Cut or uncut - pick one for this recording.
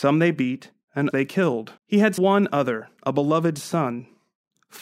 cut